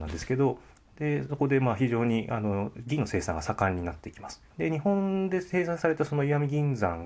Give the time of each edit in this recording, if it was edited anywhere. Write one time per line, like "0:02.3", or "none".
0:04.5